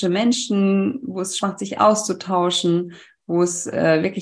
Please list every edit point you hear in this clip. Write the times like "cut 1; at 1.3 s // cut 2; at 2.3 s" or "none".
cut 1; at 1.4 s